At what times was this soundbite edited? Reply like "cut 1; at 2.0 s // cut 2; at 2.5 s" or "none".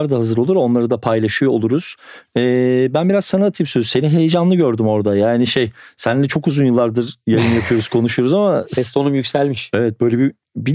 none